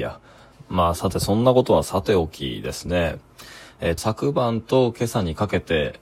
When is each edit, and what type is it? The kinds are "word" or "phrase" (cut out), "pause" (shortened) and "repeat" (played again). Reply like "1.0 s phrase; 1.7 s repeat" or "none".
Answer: 4.0 s word